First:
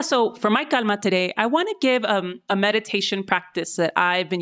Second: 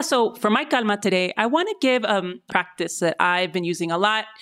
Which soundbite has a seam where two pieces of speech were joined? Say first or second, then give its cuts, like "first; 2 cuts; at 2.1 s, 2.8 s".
second; 1 cut; at 2.5 s